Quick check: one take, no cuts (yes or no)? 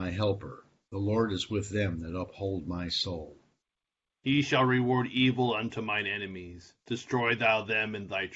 yes